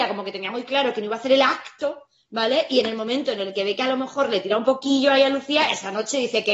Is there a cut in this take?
no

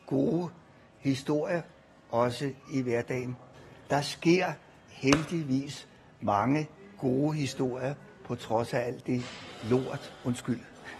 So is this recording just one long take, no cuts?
yes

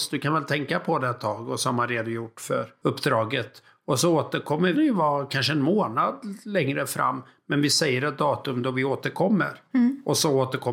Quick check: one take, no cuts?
no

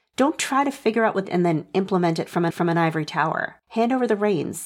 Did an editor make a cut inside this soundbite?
yes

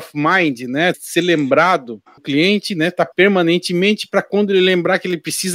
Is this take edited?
yes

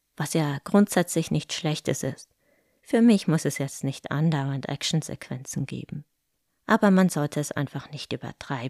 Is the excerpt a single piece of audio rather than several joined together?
yes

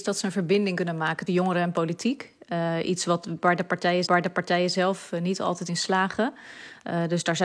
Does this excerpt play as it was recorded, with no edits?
no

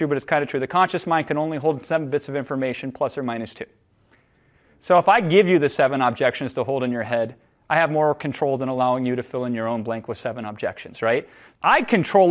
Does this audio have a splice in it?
no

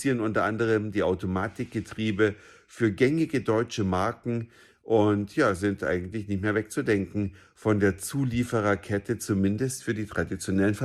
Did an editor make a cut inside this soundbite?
no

